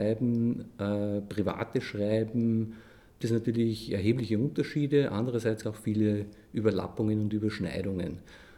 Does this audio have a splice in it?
yes; 2 cuts; at 3.2 s, 5.6 s

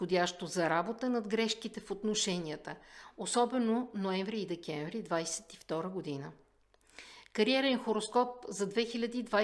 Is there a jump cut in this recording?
no; 0 cuts

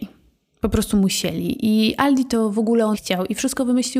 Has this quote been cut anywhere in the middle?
yes; 1 cut; at 2.9 s

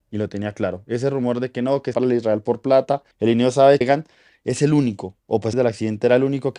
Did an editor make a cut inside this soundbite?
yes; 5 cuts; at 1.9 s, 3.1 s, 3.8 s, 5.2 s, 5.5 s

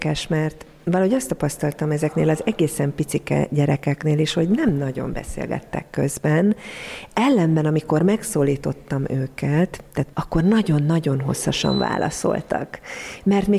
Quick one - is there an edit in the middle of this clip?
yes; 1 cut; at 10.1 s

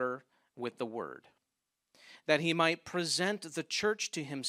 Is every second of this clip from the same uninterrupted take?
yes; 0 cuts

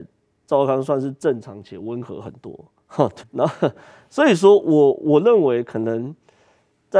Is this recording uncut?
no; 1 cut; at 3.2 s

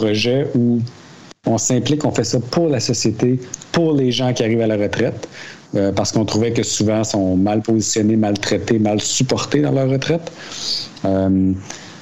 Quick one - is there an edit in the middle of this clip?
no; 0 cuts

